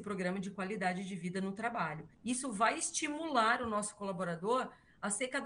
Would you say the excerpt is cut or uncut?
cut